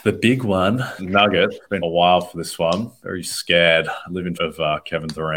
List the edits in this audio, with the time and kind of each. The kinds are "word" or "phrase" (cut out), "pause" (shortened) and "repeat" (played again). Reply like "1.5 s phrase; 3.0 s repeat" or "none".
1.0 s word; 1.8 s word; 4.3 s word